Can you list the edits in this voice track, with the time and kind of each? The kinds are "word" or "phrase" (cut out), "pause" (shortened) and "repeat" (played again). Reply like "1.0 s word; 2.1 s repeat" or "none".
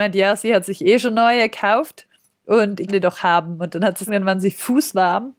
2.9 s word; 4.1 s phrase